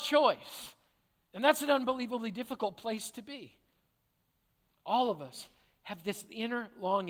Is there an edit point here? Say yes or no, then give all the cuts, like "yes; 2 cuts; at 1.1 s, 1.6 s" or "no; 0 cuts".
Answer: no; 0 cuts